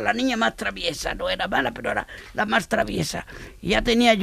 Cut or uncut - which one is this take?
uncut